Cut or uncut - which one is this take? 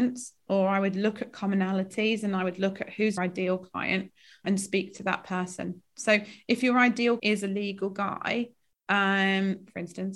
cut